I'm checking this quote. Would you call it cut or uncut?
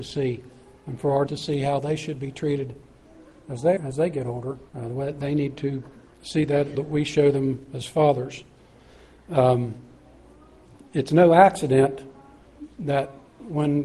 cut